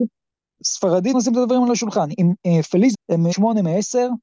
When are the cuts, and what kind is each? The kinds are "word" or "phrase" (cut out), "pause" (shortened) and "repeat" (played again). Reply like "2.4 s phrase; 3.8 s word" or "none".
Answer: 1.1 s word; 2.9 s word; 3.3 s word